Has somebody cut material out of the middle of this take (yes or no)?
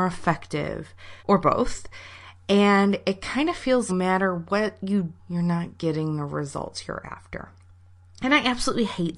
yes